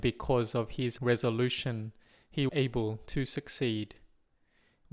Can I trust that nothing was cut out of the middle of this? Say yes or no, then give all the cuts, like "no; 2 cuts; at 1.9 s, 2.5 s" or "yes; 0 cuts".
no; 2 cuts; at 1.0 s, 2.5 s